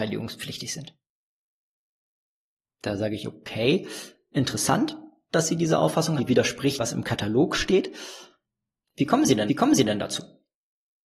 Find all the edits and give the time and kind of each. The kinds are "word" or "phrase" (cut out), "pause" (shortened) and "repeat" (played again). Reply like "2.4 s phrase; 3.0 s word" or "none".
6.2 s word; 6.8 s phrase; 9.5 s repeat